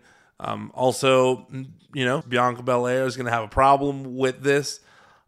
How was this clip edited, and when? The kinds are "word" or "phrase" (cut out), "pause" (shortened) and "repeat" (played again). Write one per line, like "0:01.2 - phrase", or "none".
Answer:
0:02.2 - phrase